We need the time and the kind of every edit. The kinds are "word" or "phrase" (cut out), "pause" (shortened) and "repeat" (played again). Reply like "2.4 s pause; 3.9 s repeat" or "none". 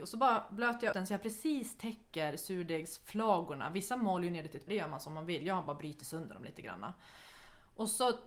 0.9 s word; 4.7 s word

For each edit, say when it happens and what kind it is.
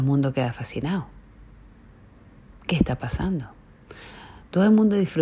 none

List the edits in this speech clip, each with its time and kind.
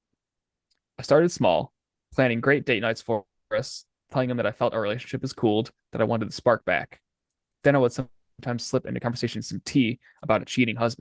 none

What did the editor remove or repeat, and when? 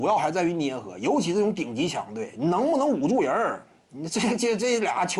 none

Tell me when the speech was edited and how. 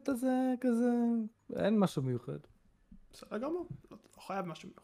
1.4 s pause

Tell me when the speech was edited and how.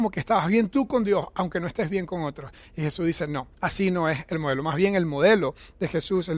3.5 s pause

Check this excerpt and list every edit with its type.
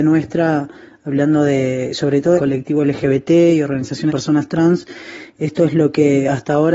2.4 s phrase; 4.1 s word

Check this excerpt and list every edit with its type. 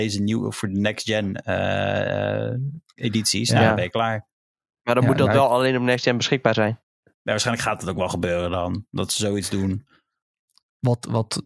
none

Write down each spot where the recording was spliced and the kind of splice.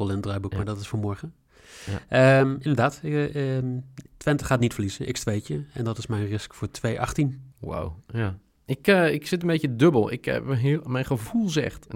4.1 s pause; 7.5 s pause

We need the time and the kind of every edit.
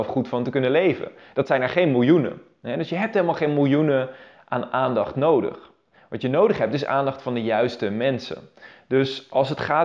none

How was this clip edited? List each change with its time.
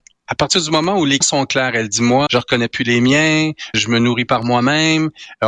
1.2 s word; 2.3 s word; 3.7 s word; 4.3 s word

